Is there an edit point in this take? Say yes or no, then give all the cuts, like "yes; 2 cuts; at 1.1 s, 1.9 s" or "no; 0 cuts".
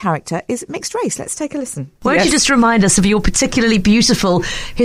yes; 1 cut; at 2.0 s